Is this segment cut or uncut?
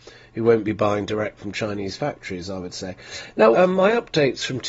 cut